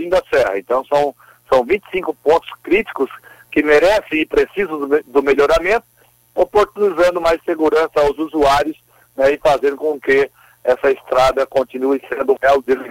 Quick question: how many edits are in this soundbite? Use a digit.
0